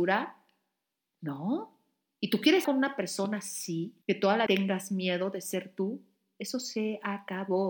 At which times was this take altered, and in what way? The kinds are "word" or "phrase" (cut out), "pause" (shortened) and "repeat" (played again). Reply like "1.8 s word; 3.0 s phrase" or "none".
2.6 s word; 4.0 s pause; 4.5 s word